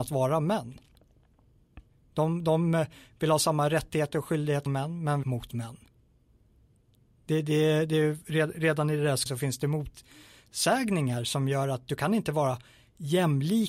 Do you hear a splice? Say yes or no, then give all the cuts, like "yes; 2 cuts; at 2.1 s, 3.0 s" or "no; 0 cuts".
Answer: yes; 3 cuts; at 4.7 s, 5.2 s, 9.3 s